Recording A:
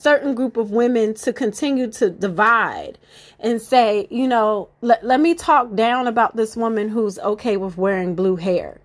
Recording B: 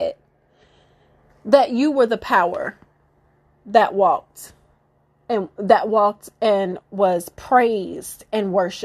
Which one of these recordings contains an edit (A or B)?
A